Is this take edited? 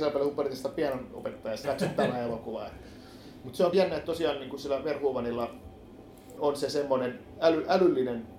yes; 3 cuts; at 1.6 s, 3.7 s, 6.4 s

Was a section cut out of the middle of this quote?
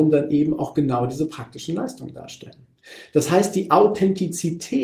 no; 0 cuts

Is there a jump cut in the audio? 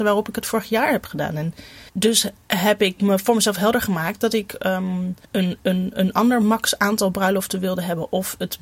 yes; 2 cuts; at 1.9 s, 5.2 s

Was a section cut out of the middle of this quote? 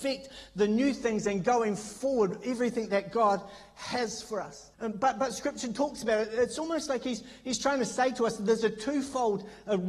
yes; 1 cut; at 4.7 s

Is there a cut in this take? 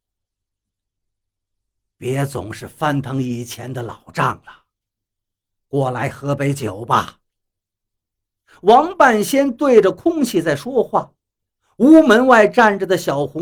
no; 0 cuts

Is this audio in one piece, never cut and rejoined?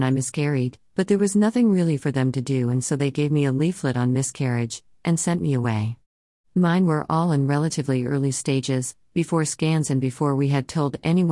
yes; 0 cuts

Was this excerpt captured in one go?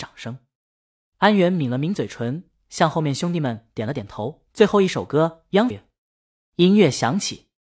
no; 2 cuts; at 4.5 s, 5.7 s

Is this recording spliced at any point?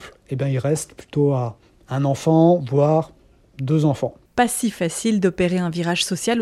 no; 0 cuts

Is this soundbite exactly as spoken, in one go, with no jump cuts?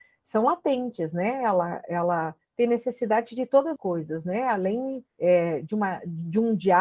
no; 2 cuts; at 3.8 s, 5.1 s

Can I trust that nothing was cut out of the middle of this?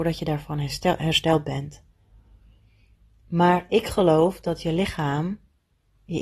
yes; 0 cuts

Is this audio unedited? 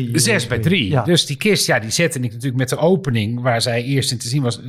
yes; 0 cuts

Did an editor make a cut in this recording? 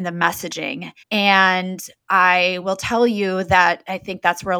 yes; 1 cut; at 1.0 s

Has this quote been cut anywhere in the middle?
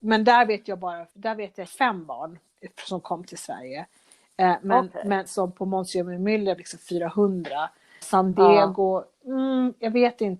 yes; 5 cuts; at 1.1 s, 1.7 s, 5.3 s, 6.6 s, 8.0 s

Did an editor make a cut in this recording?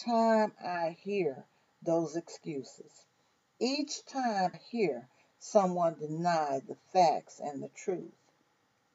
yes; 1 cut; at 4.5 s

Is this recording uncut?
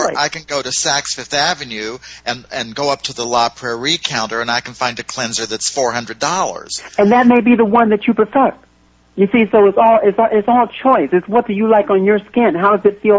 yes; 0 cuts

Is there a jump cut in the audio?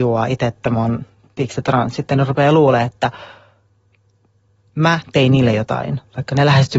no; 0 cuts

